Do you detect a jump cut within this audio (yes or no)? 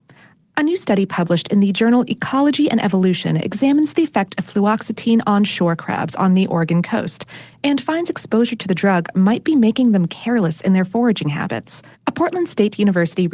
yes